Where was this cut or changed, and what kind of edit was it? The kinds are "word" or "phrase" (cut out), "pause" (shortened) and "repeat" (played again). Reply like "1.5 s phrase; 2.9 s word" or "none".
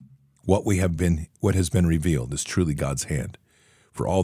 none